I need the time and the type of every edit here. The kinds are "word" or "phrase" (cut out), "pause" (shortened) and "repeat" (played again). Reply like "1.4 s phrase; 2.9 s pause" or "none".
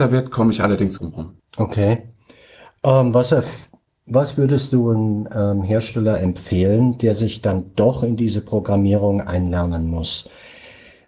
1.0 s phrase; 1.4 s pause